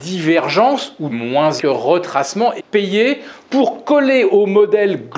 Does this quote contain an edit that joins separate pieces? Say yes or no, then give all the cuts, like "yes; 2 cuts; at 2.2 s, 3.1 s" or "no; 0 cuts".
yes; 3 cuts; at 1.1 s, 1.6 s, 2.6 s